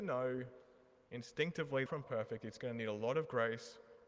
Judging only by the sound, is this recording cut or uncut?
cut